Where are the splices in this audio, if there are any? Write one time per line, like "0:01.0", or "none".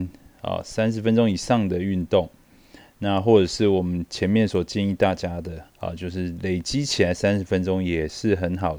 0:05.7

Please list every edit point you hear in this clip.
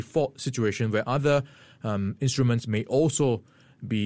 none

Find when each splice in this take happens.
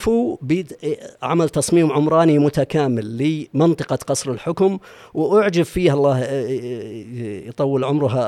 none

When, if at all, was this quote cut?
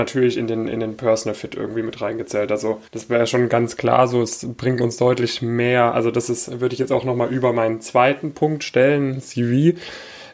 0:02.9

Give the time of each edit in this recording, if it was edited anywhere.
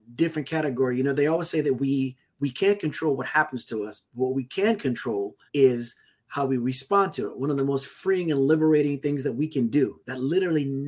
0:05.5

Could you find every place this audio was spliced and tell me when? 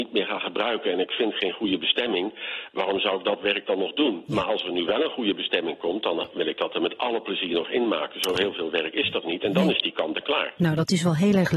none

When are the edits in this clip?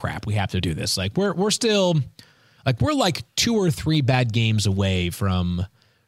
none

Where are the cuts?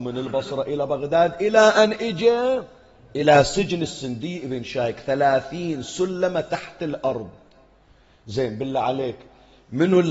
none

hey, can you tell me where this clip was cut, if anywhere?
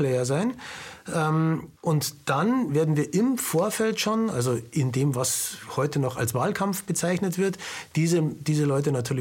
0:01.8

